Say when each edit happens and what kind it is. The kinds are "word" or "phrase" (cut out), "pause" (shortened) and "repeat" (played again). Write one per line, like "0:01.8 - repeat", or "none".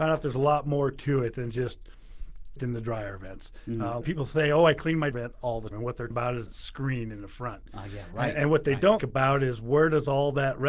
0:02.6 - word
0:04.0 - word
0:05.1 - word
0:05.7 - word
0:06.1 - word
0:06.5 - word
0:09.0 - word